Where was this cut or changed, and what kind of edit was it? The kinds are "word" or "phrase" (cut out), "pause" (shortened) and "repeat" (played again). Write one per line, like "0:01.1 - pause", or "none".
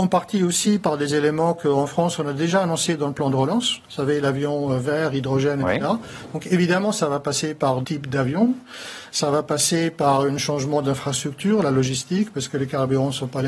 0:03.8 - pause
0:07.8 - word